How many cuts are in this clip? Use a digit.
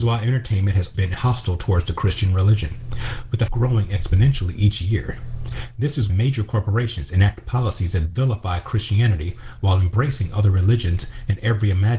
3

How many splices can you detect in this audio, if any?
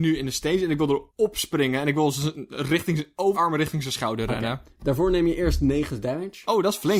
2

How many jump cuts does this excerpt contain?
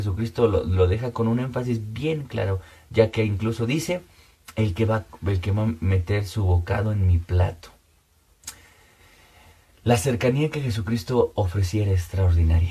0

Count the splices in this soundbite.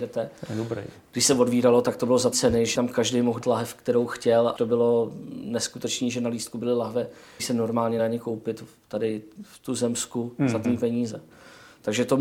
7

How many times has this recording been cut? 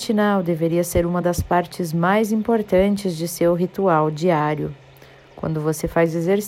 0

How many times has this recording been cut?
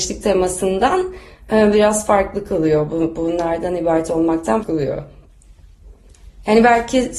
1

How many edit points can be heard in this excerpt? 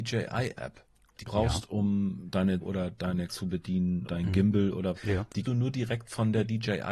6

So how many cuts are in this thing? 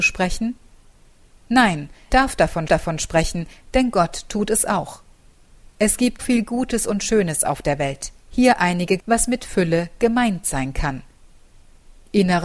5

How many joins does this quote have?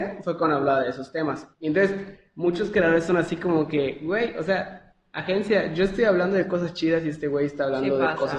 1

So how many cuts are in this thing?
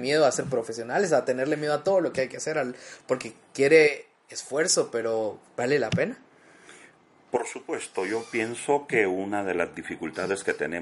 0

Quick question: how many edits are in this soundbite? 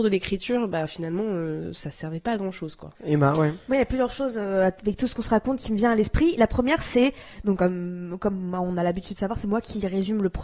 1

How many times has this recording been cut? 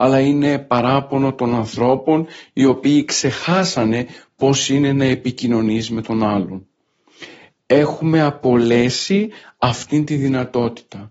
0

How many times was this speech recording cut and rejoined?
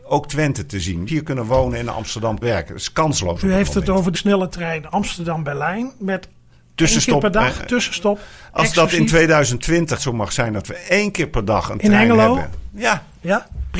4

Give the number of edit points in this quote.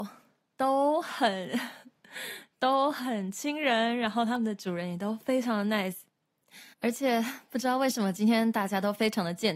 1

